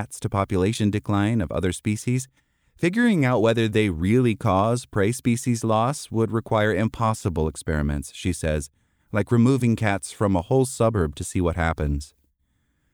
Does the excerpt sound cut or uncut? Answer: uncut